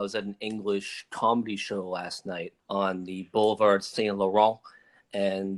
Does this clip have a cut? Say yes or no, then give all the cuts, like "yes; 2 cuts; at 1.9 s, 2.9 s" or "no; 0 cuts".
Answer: yes; 1 cut; at 2.6 s